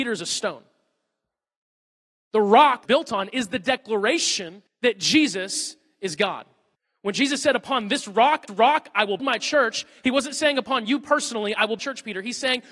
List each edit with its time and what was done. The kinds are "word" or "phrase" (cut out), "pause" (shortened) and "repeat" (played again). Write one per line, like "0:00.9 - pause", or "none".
0:02.8 - phrase
0:04.7 - pause
0:06.7 - pause
0:08.5 - repeat
0:09.2 - word
0:11.8 - phrase